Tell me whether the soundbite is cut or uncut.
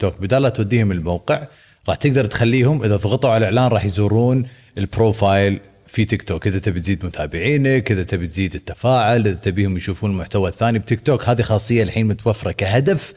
uncut